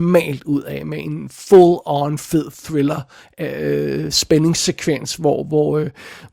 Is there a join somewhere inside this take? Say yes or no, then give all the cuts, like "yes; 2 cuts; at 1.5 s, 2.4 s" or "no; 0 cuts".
no; 0 cuts